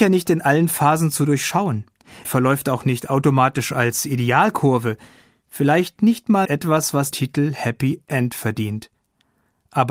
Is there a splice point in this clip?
yes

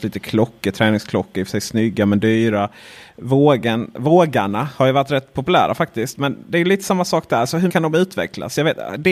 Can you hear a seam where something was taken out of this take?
yes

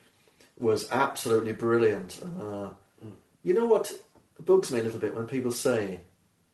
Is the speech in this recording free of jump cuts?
yes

